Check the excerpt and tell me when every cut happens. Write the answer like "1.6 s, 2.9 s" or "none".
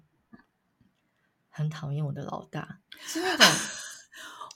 2.9 s